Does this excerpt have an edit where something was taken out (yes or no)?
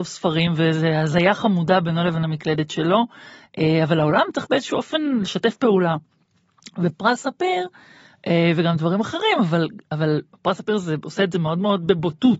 no